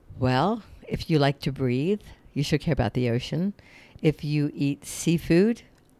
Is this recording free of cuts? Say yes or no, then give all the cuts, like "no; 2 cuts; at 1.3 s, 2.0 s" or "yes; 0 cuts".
yes; 0 cuts